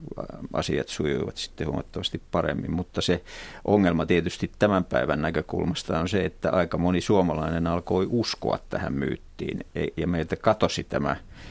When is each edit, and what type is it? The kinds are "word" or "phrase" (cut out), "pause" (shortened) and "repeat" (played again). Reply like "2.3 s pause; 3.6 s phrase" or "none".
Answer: none